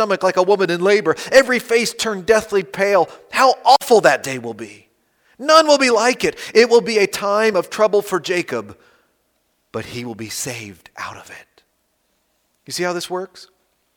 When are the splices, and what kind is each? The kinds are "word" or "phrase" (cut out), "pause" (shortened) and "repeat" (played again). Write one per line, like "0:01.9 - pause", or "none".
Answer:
none